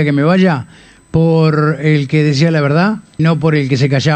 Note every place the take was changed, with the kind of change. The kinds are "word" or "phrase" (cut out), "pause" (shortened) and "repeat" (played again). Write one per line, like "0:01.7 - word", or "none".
0:03.2 - word